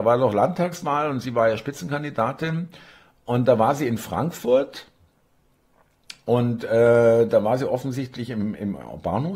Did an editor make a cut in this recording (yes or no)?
no